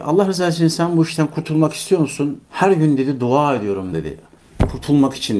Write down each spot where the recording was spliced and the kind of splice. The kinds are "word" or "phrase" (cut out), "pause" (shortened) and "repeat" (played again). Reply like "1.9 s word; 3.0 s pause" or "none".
2.4 s pause; 3.9 s phrase

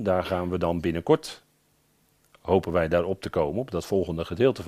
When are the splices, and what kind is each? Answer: none

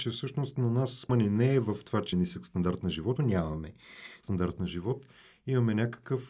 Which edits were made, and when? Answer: 1.1 s word; 2.1 s word; 3.2 s word; 4.2 s word

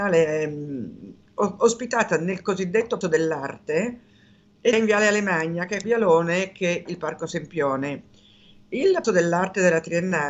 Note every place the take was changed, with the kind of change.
1.3 s word; 3.0 s word; 4.7 s word; 5.8 s word; 6.9 s word; 9.0 s word

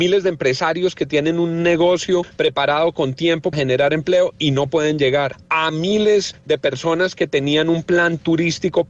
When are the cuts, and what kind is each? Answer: 3.5 s word

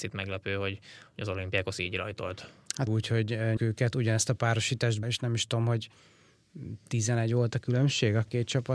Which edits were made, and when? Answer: 2.9 s word; 3.6 s phrase; 5.0 s word

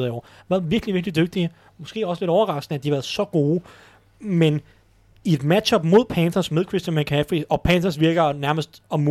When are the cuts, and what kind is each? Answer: none

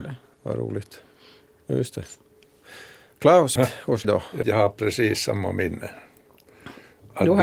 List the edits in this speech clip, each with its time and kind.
3.6 s phrase; 4.0 s word; 4.4 s phrase

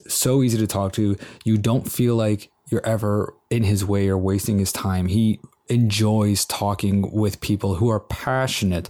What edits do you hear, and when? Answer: 3.4 s pause

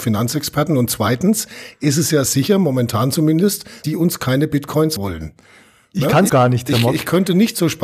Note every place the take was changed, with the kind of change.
2.3 s word; 3.8 s word; 5.0 s word; 6.3 s word

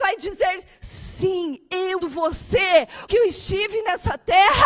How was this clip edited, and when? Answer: 2.0 s word; 3.1 s word

